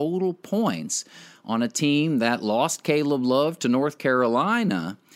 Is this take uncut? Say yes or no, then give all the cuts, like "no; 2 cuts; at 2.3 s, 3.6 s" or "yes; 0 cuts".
yes; 0 cuts